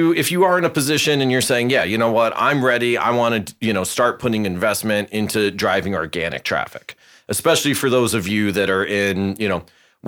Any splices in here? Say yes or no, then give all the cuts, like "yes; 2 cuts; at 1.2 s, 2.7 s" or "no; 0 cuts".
no; 0 cuts